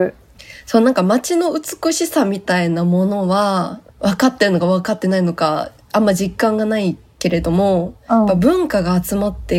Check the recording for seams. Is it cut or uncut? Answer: cut